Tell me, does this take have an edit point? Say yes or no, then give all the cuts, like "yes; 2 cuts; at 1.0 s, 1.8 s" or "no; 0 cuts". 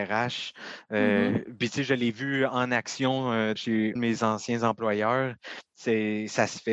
yes; 2 cuts; at 3.6 s, 4.0 s